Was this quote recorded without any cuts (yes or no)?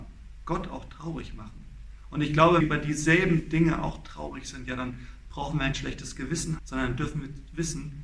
no